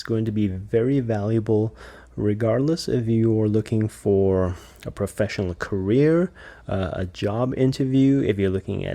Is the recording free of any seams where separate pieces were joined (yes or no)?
yes